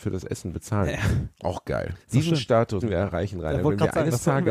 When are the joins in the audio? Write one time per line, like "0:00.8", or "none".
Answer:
0:01.3
0:02.0
0:02.8